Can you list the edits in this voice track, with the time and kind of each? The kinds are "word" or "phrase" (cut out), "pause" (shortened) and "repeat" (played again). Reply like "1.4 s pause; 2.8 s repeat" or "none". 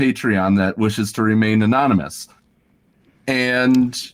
none